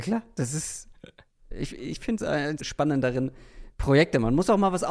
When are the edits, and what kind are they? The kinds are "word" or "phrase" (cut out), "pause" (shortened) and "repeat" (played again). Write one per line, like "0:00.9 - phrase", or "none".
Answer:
0:01.7 - word
0:02.2 - word
0:02.6 - word